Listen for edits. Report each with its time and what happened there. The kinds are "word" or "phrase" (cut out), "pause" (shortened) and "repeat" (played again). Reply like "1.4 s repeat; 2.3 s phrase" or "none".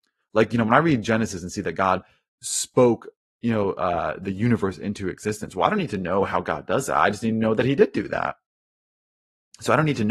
none